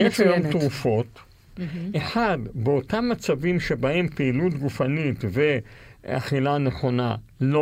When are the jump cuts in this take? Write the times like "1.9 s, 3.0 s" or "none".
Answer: none